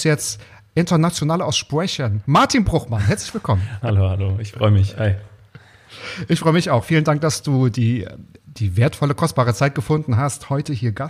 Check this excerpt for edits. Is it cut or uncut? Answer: cut